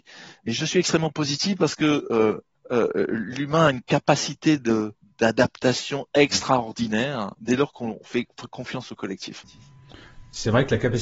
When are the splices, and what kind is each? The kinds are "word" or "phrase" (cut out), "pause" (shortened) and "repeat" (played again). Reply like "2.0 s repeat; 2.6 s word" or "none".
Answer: 2.5 s pause; 5.0 s pause